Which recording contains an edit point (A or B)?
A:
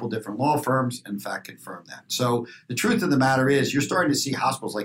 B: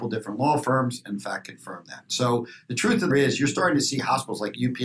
B